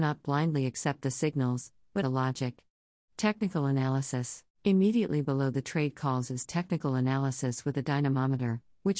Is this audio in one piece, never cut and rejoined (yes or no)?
no